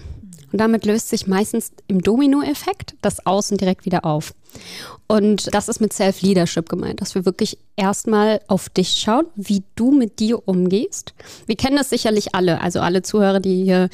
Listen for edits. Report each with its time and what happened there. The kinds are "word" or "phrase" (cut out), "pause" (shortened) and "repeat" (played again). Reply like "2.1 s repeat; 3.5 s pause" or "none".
5.5 s word